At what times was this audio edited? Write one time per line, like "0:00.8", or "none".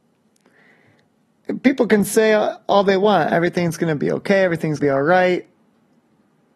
0:04.8